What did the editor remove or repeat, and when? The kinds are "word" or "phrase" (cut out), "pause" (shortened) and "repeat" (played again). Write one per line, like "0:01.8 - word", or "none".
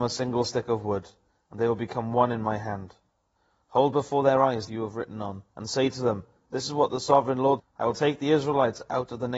0:04.7 - word
0:05.5 - pause
0:07.6 - word